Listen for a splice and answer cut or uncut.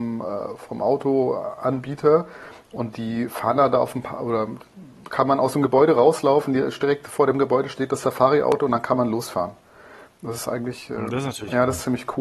uncut